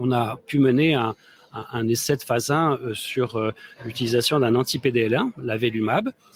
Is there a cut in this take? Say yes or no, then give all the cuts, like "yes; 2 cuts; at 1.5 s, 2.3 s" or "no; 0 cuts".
no; 0 cuts